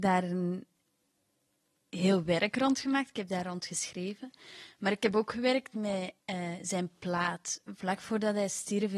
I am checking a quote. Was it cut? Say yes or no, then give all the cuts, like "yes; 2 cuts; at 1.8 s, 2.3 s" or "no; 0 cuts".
yes; 1 cut; at 6.2 s